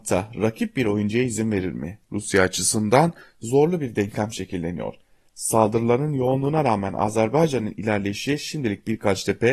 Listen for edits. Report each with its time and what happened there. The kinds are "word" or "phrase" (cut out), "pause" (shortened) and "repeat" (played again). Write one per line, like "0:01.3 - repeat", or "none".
none

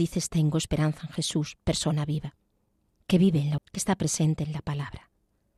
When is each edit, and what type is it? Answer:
0:02.8 - pause
0:03.6 - word

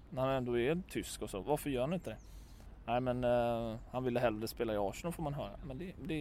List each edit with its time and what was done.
0:01.4 - word

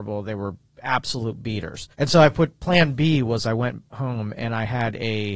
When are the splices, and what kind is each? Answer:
0:01.9 - pause

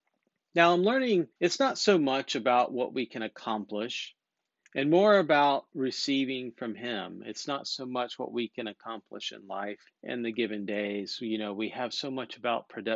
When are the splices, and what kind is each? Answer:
0:01.3 - pause
0:04.5 - pause
0:09.9 - pause

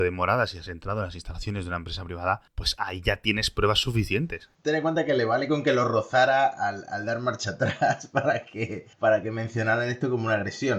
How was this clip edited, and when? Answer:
0:08.9 - pause

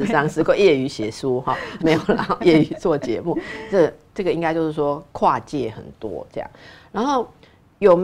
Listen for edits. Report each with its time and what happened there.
0:01.8 - word
0:02.4 - word

